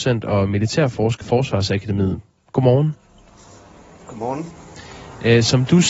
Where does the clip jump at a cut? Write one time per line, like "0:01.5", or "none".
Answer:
0:01.2